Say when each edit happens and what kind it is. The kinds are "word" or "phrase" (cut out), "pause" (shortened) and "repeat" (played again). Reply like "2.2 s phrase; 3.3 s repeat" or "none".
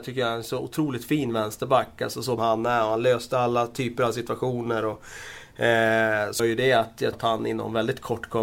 2.4 s phrase; 6.4 s word; 7.1 s word